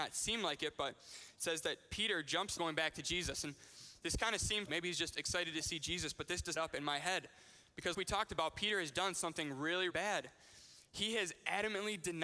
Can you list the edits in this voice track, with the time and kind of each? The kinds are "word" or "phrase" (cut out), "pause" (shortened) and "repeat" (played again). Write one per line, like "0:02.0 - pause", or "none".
0:02.6 - phrase
0:04.6 - word
0:06.6 - phrase
0:07.9 - word
0:09.9 - word